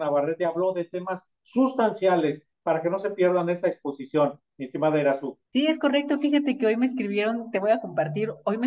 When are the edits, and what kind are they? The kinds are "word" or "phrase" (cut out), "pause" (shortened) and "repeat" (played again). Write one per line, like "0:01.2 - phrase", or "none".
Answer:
0:05.5 - pause